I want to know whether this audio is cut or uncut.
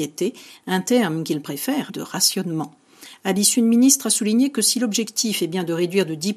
cut